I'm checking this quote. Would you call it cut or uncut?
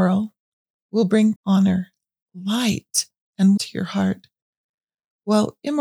cut